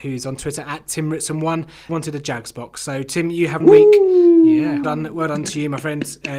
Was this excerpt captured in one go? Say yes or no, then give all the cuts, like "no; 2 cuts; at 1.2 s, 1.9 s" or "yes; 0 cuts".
no; 3 cuts; at 1.9 s, 3.6 s, 4.8 s